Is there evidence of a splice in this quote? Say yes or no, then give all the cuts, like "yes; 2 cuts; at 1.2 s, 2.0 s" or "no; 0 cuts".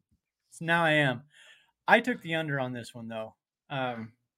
no; 0 cuts